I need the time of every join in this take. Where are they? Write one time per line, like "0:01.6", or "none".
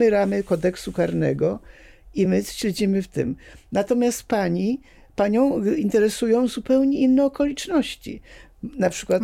none